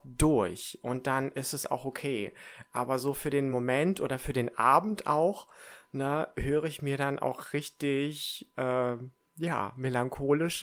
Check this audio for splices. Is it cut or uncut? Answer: uncut